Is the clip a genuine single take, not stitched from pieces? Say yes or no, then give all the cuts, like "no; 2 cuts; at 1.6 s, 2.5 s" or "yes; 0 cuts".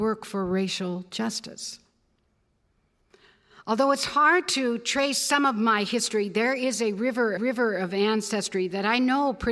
no; 1 cut; at 7.4 s